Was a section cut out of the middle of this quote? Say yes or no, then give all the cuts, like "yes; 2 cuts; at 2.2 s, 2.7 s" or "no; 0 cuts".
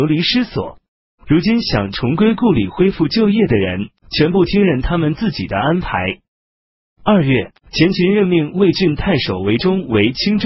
yes; 2 cuts; at 4.0 s, 7.6 s